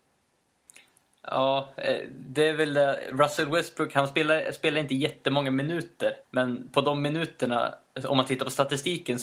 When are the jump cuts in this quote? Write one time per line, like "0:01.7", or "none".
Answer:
0:06.2